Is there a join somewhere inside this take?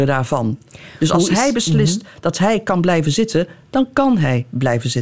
no; 0 cuts

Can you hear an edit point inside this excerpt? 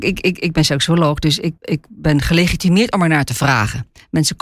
yes; 1 cut; at 1.6 s

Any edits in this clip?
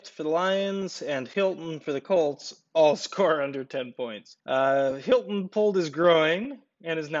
yes; 1 cut; at 4.4 s

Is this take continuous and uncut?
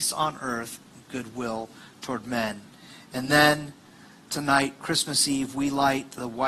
yes; 0 cuts

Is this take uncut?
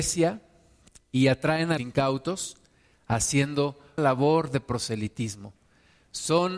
no; 3 cuts; at 0.9 s, 1.8 s, 4.0 s

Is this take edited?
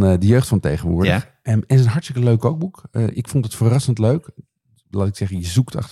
no; 0 cuts

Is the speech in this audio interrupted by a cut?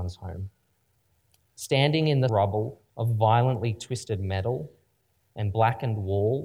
yes; 2 cuts; at 2.3 s, 2.9 s

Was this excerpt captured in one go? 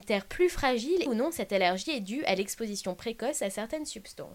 no; 1 cut; at 1.1 s

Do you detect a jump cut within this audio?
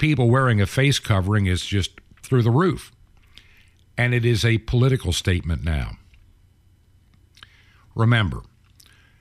no; 0 cuts

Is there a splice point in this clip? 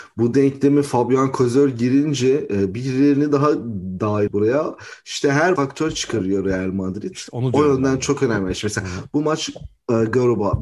yes; 2 cuts; at 4.3 s, 5.6 s

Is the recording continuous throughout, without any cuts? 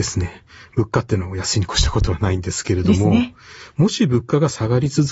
yes; 0 cuts

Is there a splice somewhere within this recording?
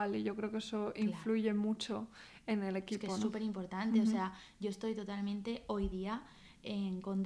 no; 0 cuts

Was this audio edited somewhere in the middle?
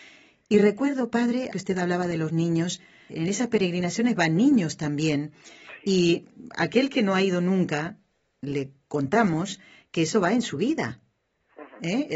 yes; 2 cuts; at 1.5 s, 3.1 s

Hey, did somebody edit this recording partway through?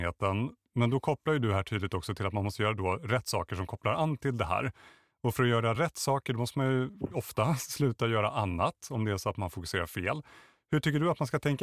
no; 0 cuts

